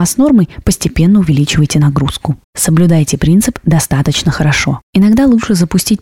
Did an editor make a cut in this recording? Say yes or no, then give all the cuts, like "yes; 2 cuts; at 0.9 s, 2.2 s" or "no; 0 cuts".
yes; 1 cut; at 2.4 s